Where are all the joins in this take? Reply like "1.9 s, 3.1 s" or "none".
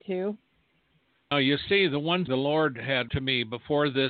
1.3 s, 2.3 s, 3.1 s